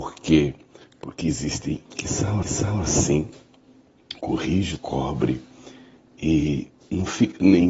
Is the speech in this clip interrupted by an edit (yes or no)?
yes